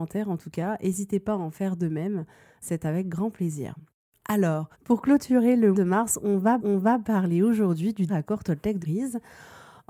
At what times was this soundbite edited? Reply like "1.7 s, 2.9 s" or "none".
2.6 s, 4.7 s, 5.7 s, 6.6 s, 8.1 s, 8.8 s